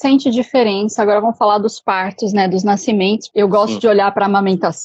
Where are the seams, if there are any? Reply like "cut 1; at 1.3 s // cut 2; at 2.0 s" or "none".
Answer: none